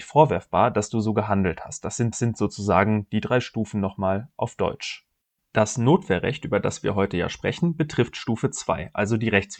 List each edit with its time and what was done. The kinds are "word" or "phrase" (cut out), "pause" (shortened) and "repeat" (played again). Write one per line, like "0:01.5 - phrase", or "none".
0:02.1 - repeat
0:05.2 - pause